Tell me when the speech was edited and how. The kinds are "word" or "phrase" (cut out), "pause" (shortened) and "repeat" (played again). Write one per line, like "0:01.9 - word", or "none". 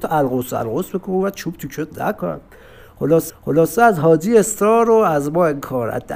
0:03.3 - repeat